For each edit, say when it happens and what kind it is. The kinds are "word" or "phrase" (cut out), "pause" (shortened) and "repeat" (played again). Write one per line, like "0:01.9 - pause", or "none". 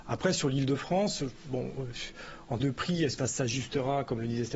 0:02.6 - word
0:03.2 - word